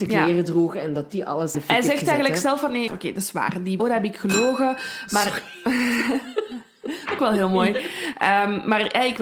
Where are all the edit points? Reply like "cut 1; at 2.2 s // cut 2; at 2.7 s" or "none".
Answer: cut 1; at 1.5 s // cut 2; at 2.9 s // cut 3; at 3.8 s // cut 4; at 7.2 s